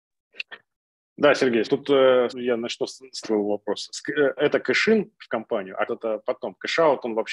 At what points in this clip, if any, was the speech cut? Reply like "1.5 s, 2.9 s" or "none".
1.6 s, 2.3 s, 3.2 s, 4.4 s, 5.9 s